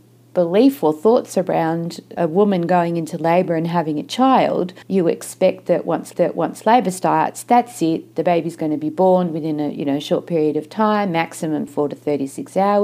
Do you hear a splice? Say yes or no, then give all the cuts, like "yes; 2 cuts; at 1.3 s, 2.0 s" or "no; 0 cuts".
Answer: yes; 4 cuts; at 2.2 s, 4.8 s, 6.1 s, 11.7 s